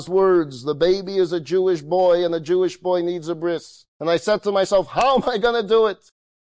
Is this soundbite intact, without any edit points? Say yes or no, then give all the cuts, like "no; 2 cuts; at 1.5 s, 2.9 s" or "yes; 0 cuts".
no; 1 cut; at 3.9 s